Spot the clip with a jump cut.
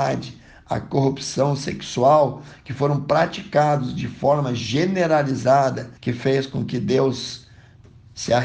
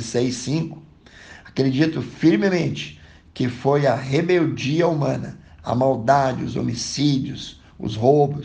first; 1 cut; at 6.0 s

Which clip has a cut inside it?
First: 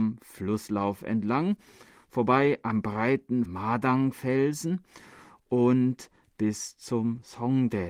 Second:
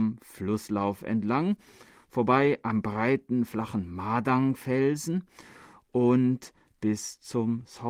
first; 1 cut; at 3.5 s

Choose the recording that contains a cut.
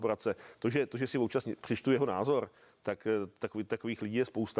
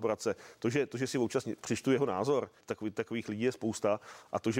second; 1 cut; at 2.6 s

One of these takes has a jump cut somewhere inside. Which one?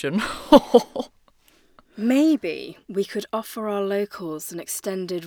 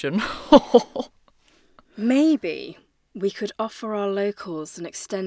first; 1 cut; at 2.8 s

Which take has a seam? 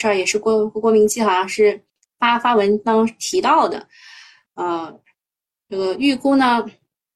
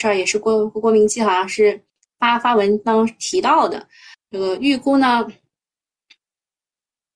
second; 1 cut; at 4.1 s

